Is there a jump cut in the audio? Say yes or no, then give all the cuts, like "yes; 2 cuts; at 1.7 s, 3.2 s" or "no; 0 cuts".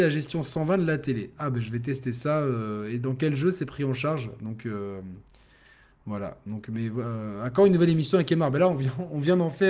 no; 0 cuts